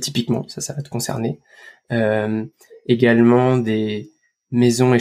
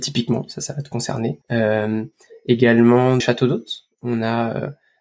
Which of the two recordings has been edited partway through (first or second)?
second